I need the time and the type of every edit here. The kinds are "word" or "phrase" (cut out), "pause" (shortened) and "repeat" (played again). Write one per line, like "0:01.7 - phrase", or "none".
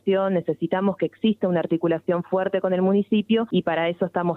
none